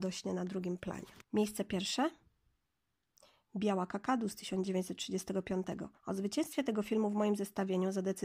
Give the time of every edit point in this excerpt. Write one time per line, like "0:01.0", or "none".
0:01.2
0:06.0